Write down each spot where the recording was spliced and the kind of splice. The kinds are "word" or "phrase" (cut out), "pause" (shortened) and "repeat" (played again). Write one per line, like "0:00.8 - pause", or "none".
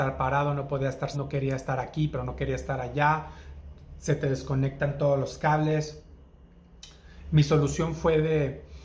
0:01.1 - word

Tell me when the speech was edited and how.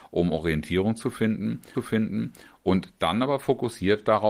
0:01.7 - repeat

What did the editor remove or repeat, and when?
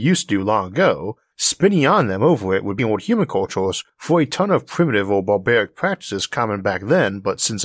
0:02.8 - phrase

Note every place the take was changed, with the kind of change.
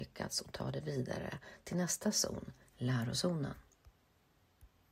none

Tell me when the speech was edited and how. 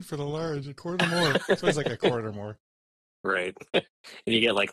none

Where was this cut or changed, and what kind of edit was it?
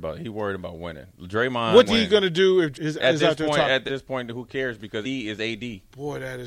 0:01.9 - word
0:02.7 - word
0:03.9 - word
0:05.0 - word

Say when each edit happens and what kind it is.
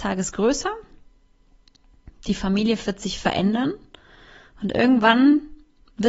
none

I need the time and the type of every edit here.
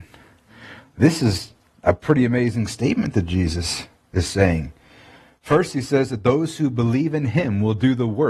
none

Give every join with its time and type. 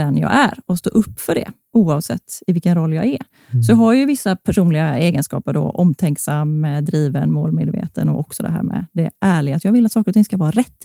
none

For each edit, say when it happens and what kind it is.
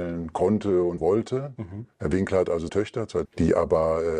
0:01.0 - word
0:01.9 - pause
0:02.7 - word
0:03.3 - phrase

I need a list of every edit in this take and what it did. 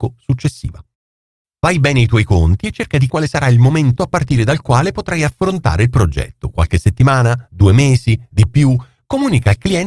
0:03.1 - word
0:04.0 - word

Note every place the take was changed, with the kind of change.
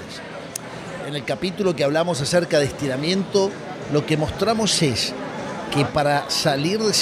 none

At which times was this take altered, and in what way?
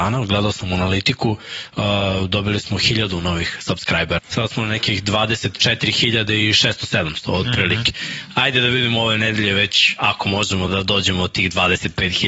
0:04.2 - phrase
0:10.7 - word

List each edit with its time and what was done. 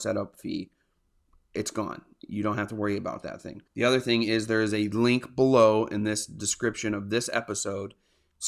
0:03.7 - pause

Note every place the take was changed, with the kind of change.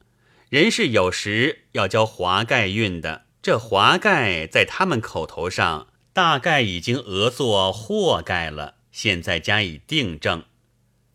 0:03.3 - pause
0:06.0 - pause
0:08.9 - pause

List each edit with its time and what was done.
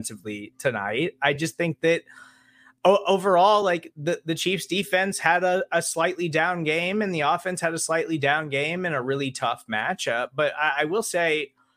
none

